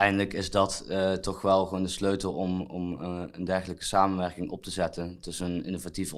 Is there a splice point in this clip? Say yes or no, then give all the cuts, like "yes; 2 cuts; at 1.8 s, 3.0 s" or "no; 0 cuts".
no; 0 cuts